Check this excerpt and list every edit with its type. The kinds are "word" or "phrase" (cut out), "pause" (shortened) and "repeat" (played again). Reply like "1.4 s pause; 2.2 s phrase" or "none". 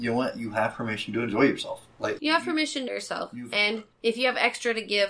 2.2 s word; 2.9 s word; 3.9 s pause